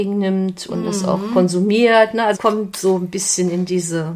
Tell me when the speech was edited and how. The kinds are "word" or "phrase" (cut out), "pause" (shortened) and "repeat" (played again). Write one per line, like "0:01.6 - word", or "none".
0:02.3 - word